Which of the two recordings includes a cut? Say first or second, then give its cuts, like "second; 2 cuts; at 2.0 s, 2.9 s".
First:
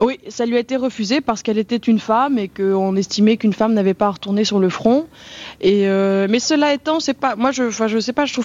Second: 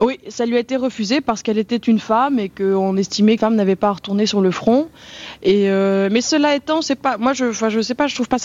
second; 1 cut; at 3.4 s